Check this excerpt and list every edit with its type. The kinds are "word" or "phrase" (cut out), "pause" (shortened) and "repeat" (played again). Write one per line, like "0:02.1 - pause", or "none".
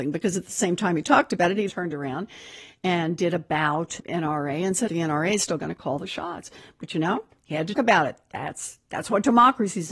0:01.7 - word
0:04.0 - word
0:04.9 - phrase
0:07.7 - word